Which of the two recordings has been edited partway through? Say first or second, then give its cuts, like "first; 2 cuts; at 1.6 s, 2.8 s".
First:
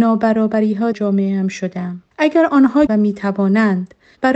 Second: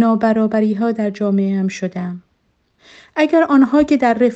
first; 3 cuts; at 0.9 s, 2.1 s, 2.9 s